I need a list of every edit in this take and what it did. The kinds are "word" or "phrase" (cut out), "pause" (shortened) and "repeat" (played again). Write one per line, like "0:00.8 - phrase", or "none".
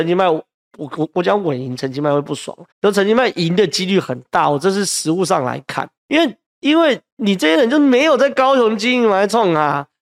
0:02.7 - pause
0:06.0 - pause

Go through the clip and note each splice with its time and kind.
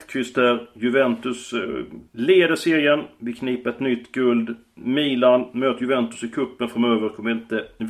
0:02.1 - pause

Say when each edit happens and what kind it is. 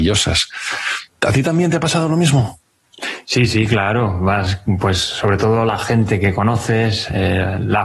none

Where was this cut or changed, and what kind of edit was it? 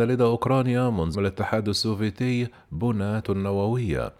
0:01.1 - word
0:03.2 - word

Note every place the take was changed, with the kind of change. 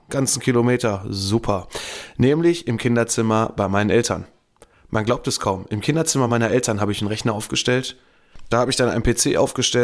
none

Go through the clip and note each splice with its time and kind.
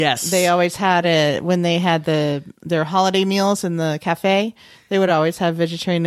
none

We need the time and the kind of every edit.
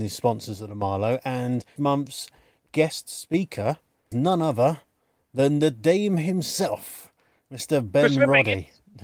0:01.8 - word
0:04.1 - word

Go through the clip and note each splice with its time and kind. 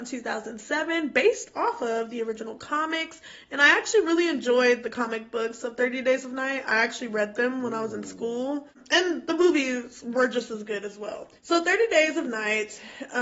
0:11.4 - pause

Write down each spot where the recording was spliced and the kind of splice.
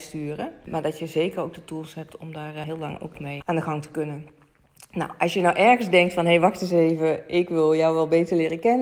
0:03.1 - word

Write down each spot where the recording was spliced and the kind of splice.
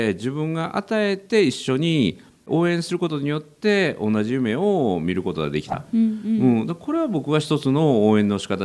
none

